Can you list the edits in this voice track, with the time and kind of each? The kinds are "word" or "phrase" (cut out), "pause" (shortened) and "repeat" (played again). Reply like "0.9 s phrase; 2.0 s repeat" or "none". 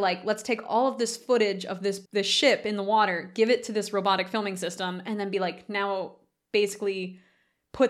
2.1 s pause